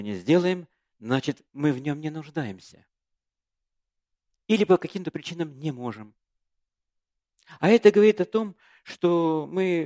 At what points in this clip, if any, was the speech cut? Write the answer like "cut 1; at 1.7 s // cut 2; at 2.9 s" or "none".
none